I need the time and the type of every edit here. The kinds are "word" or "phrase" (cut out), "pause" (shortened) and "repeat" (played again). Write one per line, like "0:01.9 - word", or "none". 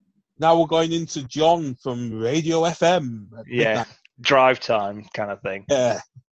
none